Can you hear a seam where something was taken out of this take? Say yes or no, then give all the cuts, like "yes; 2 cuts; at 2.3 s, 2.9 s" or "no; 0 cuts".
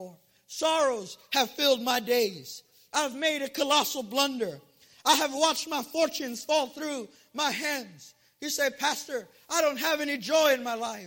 no; 0 cuts